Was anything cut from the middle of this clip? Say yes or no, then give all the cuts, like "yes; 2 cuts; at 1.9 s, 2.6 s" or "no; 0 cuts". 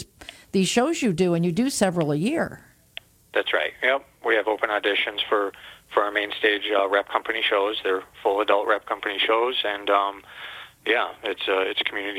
no; 0 cuts